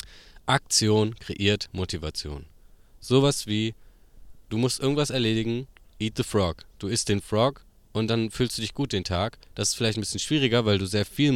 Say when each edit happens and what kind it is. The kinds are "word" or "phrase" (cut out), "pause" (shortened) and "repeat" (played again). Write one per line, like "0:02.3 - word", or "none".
none